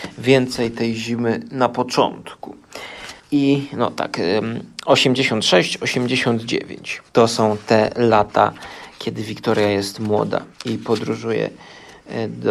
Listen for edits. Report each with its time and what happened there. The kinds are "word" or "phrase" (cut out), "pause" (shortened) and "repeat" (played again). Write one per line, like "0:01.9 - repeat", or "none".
0:03.2 - pause
0:07.1 - pause
0:10.5 - pause